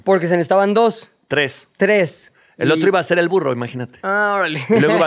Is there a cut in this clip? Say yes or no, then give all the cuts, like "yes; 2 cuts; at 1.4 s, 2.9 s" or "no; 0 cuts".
no; 0 cuts